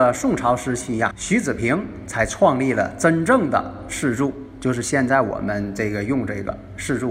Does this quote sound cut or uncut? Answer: cut